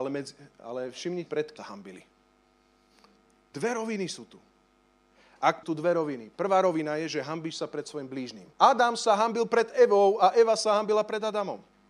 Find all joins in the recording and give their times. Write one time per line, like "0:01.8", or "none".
0:01.3
0:01.6
0:05.6
0:08.5